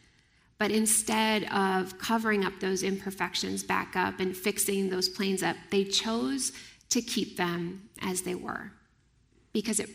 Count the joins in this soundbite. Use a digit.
0